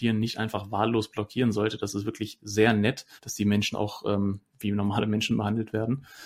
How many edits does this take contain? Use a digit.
2